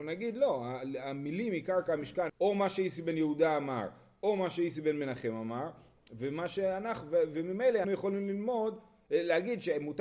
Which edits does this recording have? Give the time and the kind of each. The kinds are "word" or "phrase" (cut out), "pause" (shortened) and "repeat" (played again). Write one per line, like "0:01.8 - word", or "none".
0:02.3 - phrase
0:07.8 - word